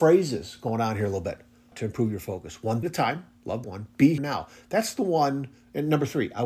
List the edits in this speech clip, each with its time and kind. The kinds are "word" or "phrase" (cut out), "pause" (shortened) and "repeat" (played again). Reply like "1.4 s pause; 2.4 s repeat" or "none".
1.7 s word; 2.8 s word; 3.6 s word; 4.2 s word